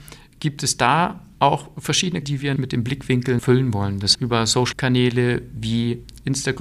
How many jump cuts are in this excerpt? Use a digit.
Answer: 5